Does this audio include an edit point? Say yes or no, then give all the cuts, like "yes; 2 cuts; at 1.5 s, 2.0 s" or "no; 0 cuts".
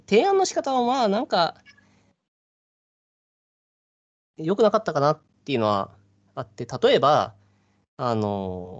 no; 0 cuts